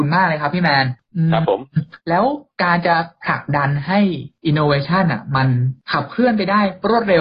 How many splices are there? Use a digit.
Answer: 1